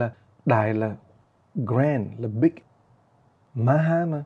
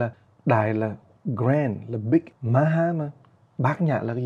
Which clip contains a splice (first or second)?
second